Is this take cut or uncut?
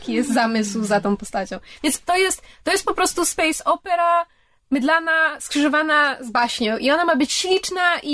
uncut